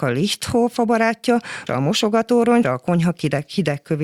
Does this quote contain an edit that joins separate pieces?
yes; 2 cuts; at 1.7 s, 2.6 s

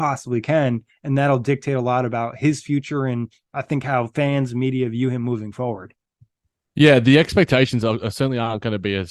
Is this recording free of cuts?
yes; 0 cuts

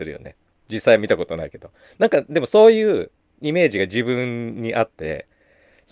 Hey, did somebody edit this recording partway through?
no; 0 cuts

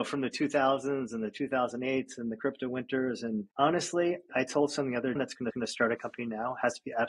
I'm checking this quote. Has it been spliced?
yes; 3 cuts; at 4.3 s, 5.1 s, 5.5 s

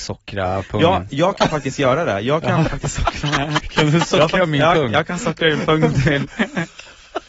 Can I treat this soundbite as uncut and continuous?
yes; 0 cuts

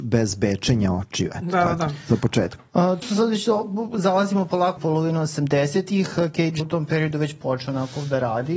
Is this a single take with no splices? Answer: no; 3 cuts; at 3.0 s, 4.8 s, 6.6 s

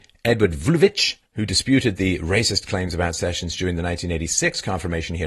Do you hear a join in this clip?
yes; 1 cut; at 1.3 s

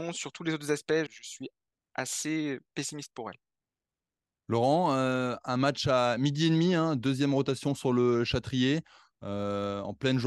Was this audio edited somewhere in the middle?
yes; 1 cut; at 1.1 s

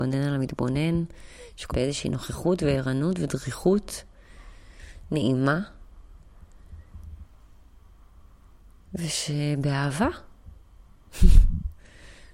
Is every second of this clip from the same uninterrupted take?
no; 1 cut; at 1.7 s

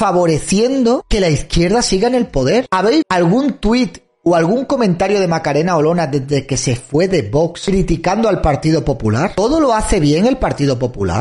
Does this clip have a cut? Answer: yes; 1 cut; at 3.0 s

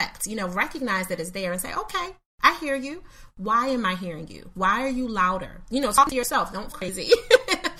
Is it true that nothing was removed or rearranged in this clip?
no; 1 cut; at 6.7 s

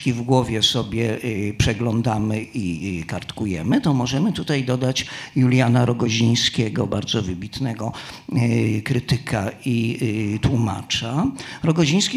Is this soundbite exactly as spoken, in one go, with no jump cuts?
yes; 0 cuts

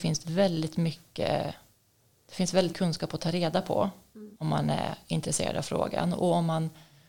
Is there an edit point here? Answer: yes; 2 cuts; at 2.7 s, 4.4 s

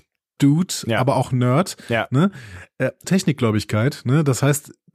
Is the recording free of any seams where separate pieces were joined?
no; 1 cut; at 3.0 s

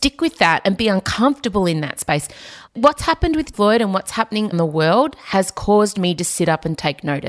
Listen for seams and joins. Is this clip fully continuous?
no; 3 cuts; at 2.7 s, 3.5 s, 4.5 s

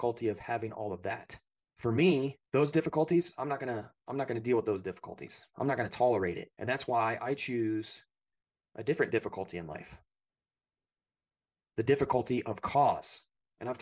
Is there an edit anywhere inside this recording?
yes; 3 cuts; at 1.6 s, 2.5 s, 6.5 s

